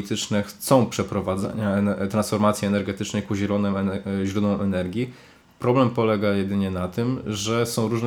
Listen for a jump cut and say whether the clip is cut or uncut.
uncut